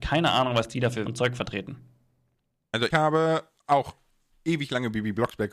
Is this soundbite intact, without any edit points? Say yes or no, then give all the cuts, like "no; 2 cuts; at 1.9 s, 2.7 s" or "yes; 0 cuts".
no; 2 cuts; at 1.1 s, 2.9 s